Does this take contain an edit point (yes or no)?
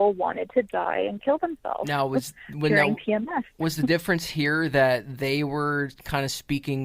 no